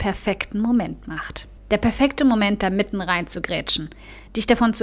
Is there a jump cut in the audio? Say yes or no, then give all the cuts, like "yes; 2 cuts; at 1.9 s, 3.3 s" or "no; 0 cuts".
yes; 1 cut; at 1.6 s